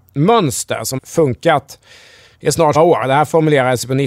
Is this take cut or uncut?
cut